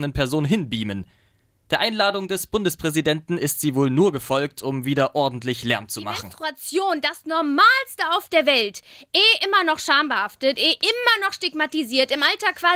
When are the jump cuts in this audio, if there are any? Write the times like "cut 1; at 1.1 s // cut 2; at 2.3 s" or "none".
none

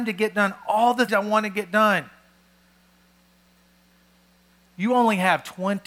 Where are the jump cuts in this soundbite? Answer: cut 1; at 1.1 s

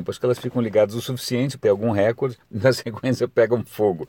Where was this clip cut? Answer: cut 1; at 1.6 s

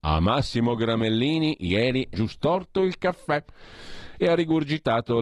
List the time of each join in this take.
cut 1; at 2.1 s

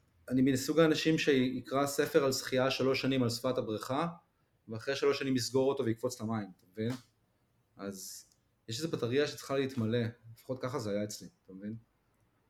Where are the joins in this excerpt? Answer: none

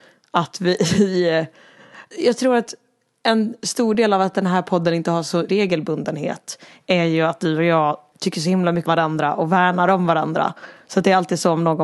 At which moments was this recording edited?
cut 1; at 2.1 s // cut 2; at 5.5 s // cut 3; at 8.1 s // cut 4; at 8.8 s

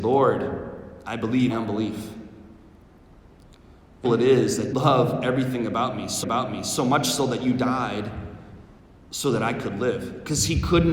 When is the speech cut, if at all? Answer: cut 1; at 1.5 s // cut 2; at 4.0 s // cut 3; at 4.7 s // cut 4; at 6.2 s // cut 5; at 8.8 s

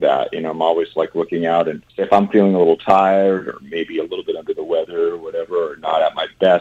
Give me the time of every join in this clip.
cut 1; at 1.9 s

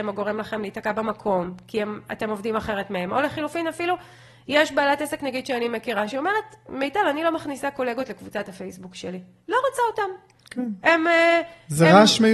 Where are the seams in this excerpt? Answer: none

